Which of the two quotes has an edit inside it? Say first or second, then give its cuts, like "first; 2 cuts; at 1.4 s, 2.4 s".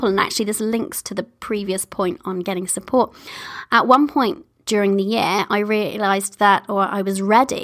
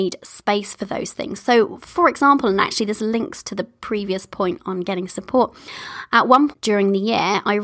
second; 1 cut; at 6.5 s